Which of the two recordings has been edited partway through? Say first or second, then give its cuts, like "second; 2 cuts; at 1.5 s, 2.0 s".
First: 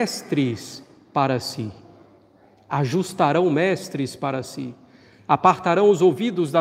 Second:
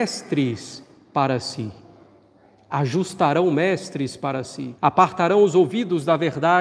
second; 1 cut; at 4.8 s